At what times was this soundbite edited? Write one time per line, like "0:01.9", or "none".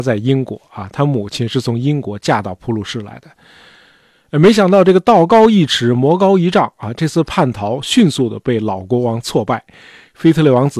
none